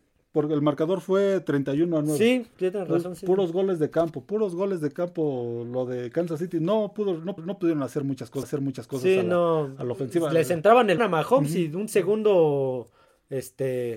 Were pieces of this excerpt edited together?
yes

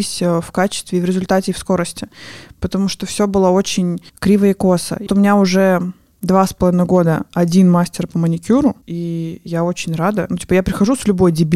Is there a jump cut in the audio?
yes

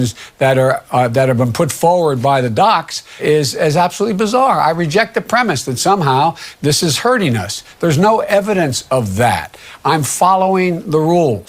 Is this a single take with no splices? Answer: no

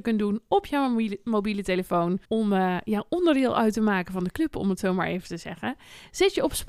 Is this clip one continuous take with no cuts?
no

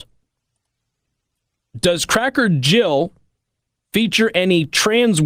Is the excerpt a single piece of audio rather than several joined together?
yes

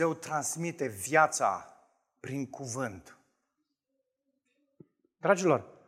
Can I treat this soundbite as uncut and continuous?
yes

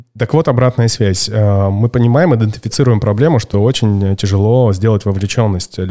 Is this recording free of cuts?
yes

